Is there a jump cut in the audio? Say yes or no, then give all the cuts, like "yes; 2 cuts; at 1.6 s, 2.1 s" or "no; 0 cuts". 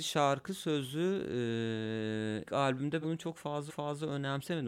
yes; 3 cuts; at 2.5 s, 3.0 s, 3.7 s